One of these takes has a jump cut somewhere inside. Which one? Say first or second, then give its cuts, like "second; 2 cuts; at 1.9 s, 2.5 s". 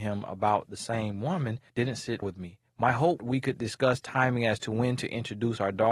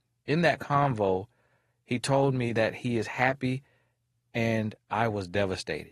first; 4 cuts; at 1.7 s, 2.2 s, 2.7 s, 3.2 s